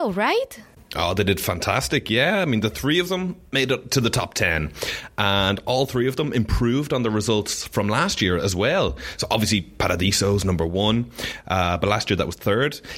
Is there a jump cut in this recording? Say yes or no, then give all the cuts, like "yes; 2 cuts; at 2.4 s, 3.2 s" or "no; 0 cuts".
no; 0 cuts